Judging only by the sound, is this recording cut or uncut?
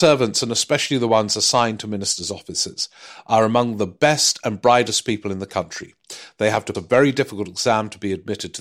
cut